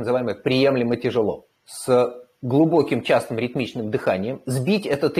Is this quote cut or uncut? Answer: cut